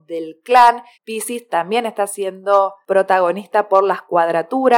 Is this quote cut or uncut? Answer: cut